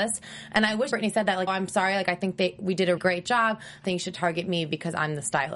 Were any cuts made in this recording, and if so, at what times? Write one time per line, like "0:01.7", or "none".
0:00.9
0:01.5
0:03.0
0:03.8